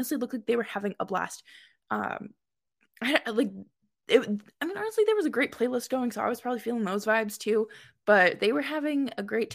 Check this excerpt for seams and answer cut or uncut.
uncut